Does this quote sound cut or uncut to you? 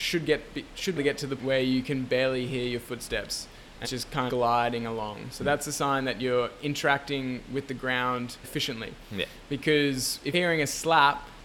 cut